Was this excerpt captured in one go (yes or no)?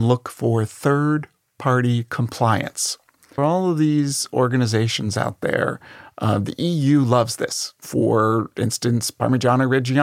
no